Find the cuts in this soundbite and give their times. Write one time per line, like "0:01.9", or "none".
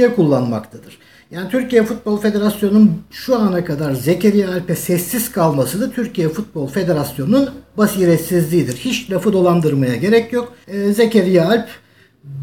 none